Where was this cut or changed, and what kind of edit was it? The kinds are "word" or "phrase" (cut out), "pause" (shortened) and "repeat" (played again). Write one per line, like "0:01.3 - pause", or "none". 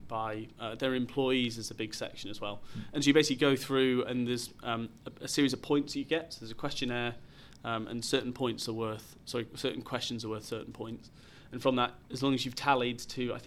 none

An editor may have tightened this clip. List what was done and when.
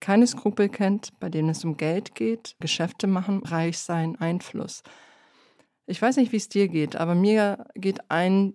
0:02.6 - word
0:03.4 - word
0:04.2 - word

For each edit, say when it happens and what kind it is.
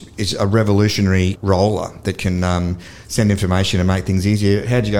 0:01.3 - word

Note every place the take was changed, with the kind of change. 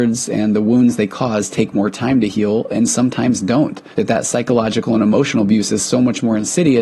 0:03.9 - pause

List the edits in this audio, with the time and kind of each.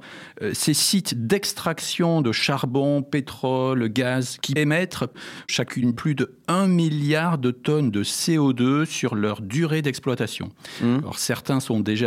0:04.6 - word

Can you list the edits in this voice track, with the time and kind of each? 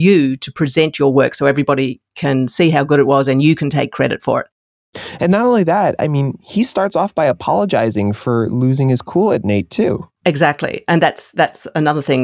0:06.4 - pause
0:10.2 - pause

